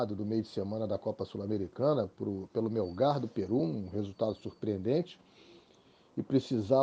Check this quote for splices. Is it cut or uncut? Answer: uncut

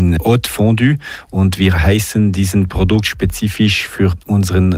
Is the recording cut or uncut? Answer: uncut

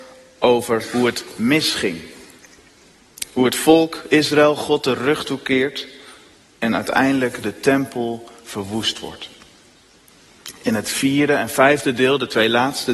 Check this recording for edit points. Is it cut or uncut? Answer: uncut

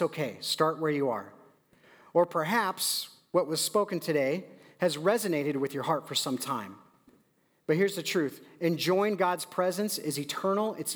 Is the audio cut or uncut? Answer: uncut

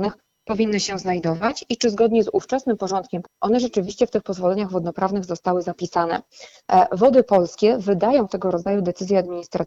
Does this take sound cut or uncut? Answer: cut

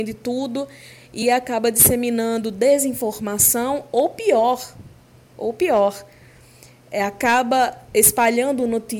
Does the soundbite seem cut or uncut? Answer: cut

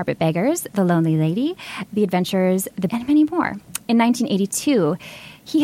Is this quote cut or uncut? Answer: cut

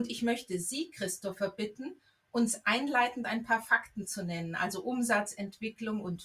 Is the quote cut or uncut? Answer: uncut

